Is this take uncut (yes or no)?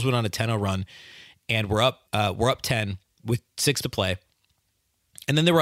no